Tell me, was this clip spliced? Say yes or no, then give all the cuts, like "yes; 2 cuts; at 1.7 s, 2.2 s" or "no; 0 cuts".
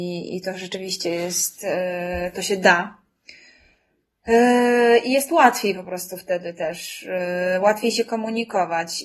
no; 0 cuts